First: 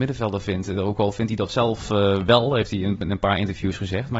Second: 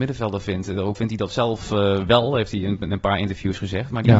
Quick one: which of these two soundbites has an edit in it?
second; 1 cut; at 0.9 s

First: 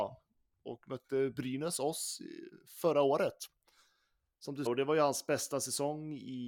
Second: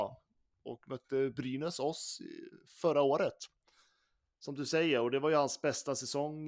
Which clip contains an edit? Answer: first; 1 cut; at 4.7 s

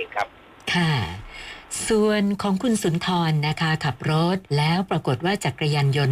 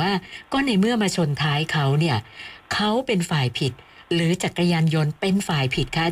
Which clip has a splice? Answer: first; 1 cut; at 4.5 s

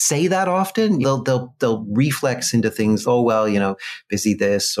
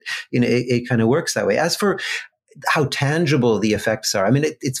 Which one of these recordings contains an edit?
first; 2 cuts; at 1.0 s, 3.0 s

